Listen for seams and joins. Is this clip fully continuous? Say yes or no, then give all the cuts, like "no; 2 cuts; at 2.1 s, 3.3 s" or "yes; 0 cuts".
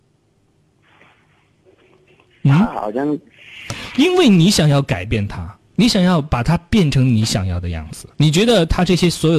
no; 1 cut; at 8.1 s